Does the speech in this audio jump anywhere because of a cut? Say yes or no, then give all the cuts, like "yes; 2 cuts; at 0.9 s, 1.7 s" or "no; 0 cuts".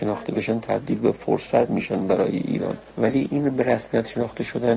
no; 0 cuts